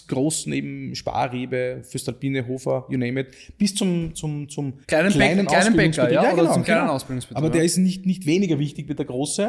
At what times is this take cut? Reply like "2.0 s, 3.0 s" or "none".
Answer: 4.8 s